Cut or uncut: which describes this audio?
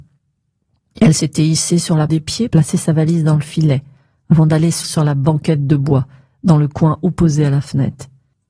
cut